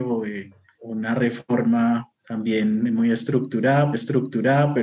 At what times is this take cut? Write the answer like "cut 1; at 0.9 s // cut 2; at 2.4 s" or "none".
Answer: cut 1; at 2.2 s // cut 2; at 3.9 s